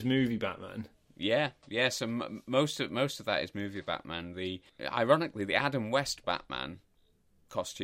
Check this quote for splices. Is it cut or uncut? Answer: cut